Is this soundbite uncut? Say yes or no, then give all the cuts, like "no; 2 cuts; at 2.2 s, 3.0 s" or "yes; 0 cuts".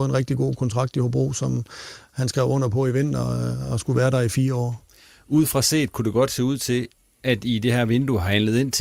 yes; 0 cuts